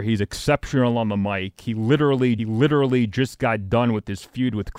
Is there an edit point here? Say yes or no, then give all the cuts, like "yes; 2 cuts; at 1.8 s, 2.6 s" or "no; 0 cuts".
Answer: yes; 1 cut; at 2.4 s